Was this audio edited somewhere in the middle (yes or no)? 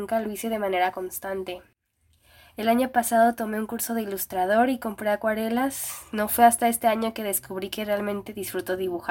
no